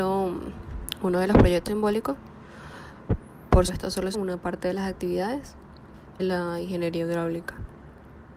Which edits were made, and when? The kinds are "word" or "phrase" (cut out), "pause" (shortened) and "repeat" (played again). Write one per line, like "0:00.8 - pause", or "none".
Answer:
0:01.7 - word
0:03.7 - word
0:04.1 - word
0:06.2 - word